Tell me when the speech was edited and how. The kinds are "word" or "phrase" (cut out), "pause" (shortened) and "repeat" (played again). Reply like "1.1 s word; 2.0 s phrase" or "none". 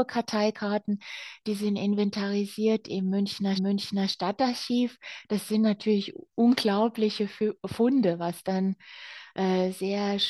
3.6 s repeat